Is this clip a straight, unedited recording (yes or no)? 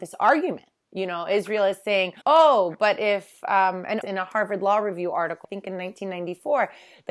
no